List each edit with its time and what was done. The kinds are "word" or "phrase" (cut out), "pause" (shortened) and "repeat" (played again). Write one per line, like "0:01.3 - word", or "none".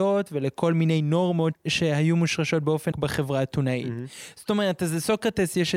0:02.9 - word

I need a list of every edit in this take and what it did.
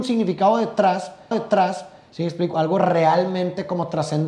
0:01.3 - repeat
0:02.5 - word

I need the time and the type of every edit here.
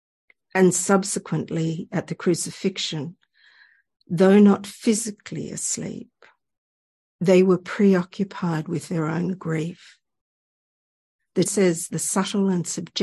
0:11.5 - word
0:11.9 - word

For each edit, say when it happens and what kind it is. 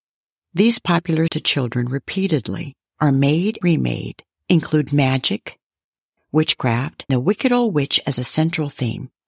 0:01.3 - phrase
0:03.6 - word
0:07.1 - word

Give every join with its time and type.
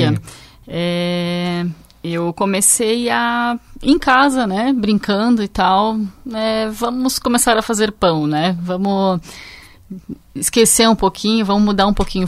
none

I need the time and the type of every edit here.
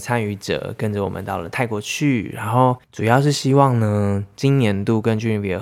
0:02.8 - pause

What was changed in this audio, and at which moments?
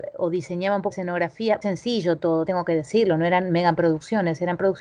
0:00.9 - word
0:01.6 - word
0:02.5 - word

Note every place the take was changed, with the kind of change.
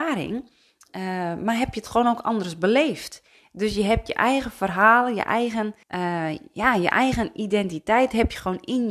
0:05.8 - pause

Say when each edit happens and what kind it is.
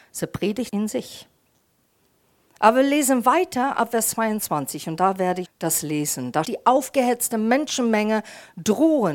0:05.4 - word
0:06.4 - phrase

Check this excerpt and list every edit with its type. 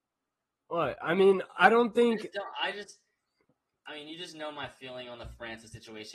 0:03.5 - pause

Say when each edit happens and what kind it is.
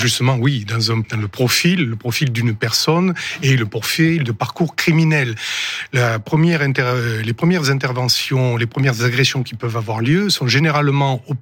0:01.0 - word

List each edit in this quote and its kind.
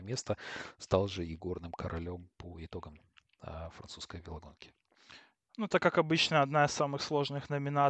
none

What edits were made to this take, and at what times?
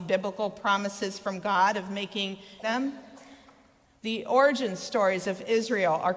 0:02.6 - phrase

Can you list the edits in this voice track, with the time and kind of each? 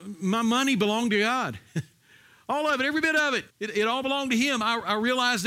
0:03.5 - pause

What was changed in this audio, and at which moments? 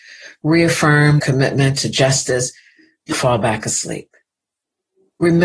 0:01.2 - word
0:03.1 - word

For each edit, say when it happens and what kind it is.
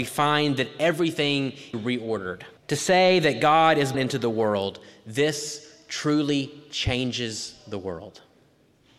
0:01.7 - phrase
0:02.6 - pause
0:03.9 - word

